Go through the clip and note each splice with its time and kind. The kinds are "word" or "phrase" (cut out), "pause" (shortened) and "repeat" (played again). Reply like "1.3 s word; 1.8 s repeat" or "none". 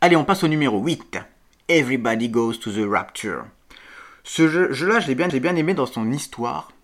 5.3 s repeat